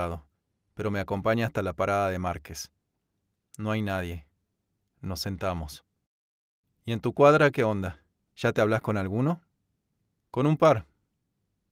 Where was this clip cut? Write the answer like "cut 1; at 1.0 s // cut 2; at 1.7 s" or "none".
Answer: none

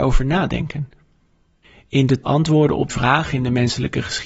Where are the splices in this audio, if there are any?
cut 1; at 2.2 s // cut 2; at 2.9 s

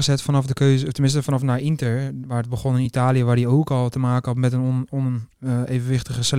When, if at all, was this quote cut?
none

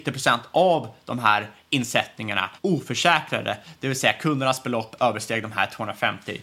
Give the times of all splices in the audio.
cut 1; at 2.6 s

